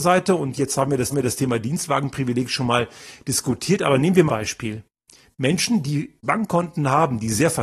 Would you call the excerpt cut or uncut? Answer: cut